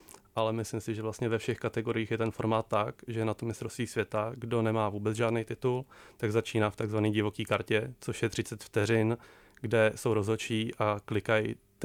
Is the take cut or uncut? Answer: uncut